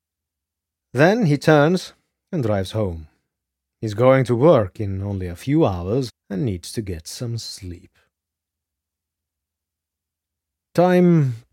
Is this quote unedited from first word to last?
no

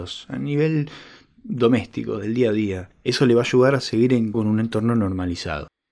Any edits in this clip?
yes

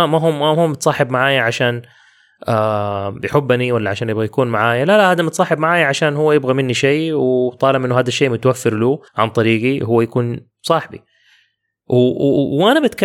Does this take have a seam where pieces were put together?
yes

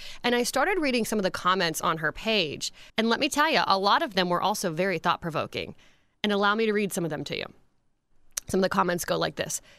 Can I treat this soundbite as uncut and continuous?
no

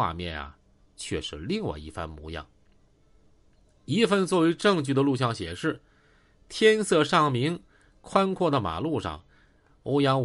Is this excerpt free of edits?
yes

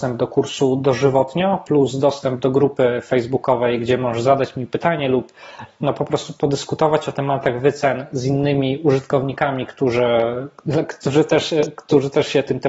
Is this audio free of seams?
yes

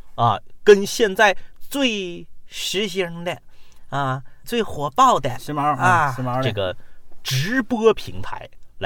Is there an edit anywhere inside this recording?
yes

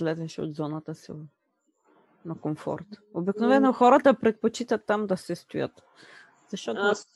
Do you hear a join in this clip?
no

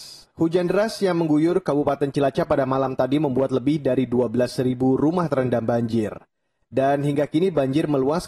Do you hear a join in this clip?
no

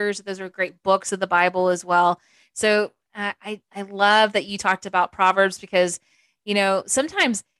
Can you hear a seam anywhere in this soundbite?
no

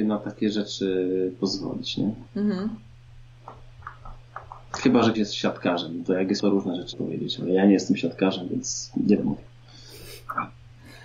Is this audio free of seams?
no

